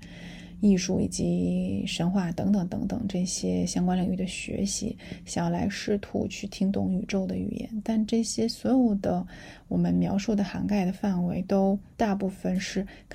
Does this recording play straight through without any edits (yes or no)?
no